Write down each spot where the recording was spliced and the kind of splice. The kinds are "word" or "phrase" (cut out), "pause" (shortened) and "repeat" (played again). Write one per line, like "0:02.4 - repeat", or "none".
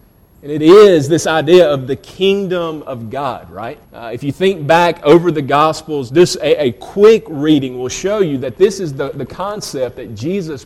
0:03.8 - pause

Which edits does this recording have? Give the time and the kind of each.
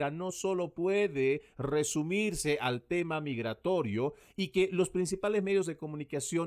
none

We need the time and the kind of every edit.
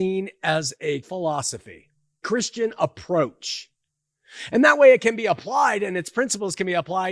0:01.0 - word
0:02.2 - word

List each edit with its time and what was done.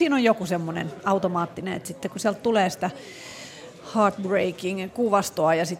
none

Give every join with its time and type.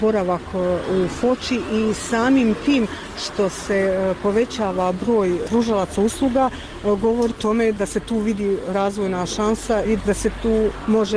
0:07.3 - word
0:09.9 - word

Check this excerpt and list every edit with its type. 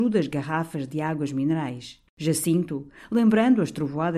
0:02.1 - pause

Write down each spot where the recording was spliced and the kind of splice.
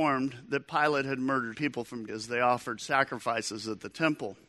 0:01.5 - word
0:02.1 - word

